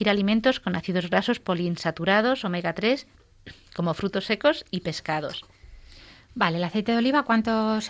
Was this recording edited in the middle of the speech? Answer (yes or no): no